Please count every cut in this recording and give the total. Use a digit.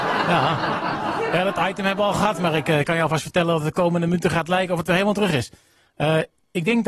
0